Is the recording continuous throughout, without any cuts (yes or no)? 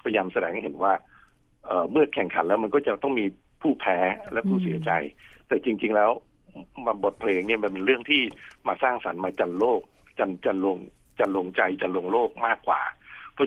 yes